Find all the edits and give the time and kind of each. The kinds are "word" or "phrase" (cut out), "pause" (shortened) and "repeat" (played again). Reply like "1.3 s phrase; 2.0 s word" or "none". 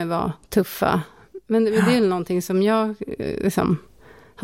none